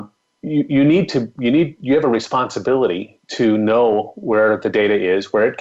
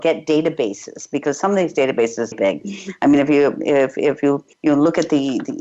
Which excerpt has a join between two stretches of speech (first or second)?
second